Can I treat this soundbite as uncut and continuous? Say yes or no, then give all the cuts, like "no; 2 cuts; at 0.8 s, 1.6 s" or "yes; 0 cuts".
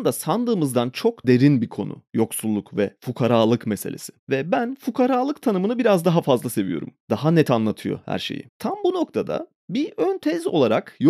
no; 3 cuts; at 1.2 s, 4.2 s, 8.5 s